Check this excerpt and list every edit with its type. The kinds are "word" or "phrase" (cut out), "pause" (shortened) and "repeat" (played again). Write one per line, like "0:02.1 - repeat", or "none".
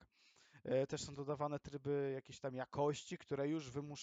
none